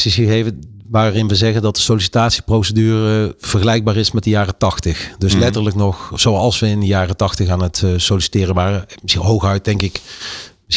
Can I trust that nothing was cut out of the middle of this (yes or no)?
yes